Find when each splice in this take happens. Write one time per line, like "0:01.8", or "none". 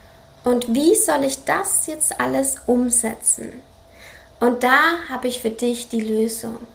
none